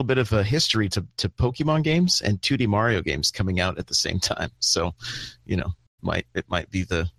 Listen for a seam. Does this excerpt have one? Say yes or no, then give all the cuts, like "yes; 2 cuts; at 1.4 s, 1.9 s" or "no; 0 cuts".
no; 0 cuts